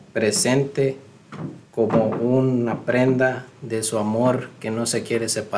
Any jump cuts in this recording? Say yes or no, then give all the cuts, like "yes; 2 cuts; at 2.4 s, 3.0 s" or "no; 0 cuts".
yes; 1 cut; at 1.7 s